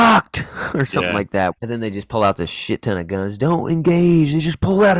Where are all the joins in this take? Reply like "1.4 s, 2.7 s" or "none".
1.6 s